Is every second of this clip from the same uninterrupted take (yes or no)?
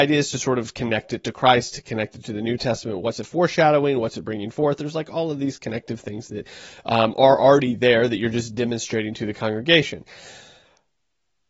yes